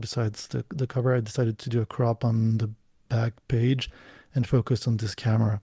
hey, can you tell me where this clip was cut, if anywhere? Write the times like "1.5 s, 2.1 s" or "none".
none